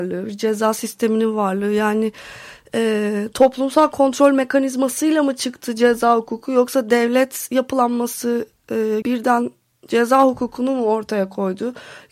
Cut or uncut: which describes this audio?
cut